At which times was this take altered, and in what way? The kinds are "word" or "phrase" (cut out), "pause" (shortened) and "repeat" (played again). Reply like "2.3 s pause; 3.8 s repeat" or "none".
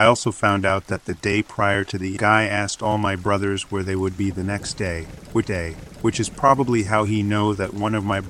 2.2 s phrase; 5.4 s repeat